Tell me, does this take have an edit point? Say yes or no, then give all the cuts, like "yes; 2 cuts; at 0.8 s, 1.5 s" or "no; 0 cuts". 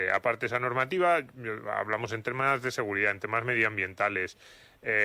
no; 0 cuts